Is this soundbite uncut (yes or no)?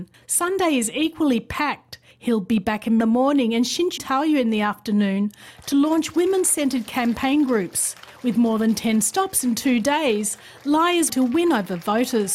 no